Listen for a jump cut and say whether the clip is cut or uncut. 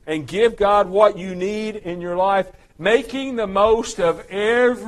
uncut